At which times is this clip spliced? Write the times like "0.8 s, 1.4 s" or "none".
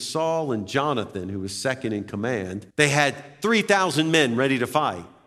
2.7 s